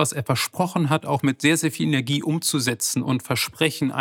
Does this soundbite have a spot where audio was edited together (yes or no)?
no